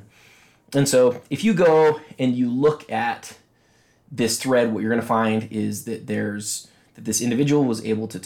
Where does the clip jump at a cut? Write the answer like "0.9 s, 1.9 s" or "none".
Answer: none